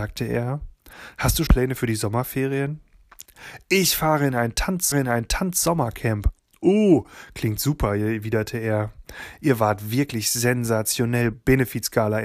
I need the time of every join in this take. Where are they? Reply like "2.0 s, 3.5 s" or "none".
1.5 s, 4.9 s, 11.3 s